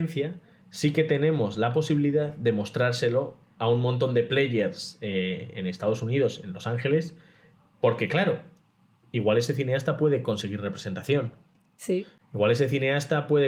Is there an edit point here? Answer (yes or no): no